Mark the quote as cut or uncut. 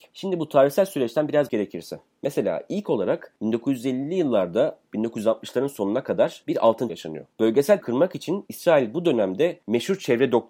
cut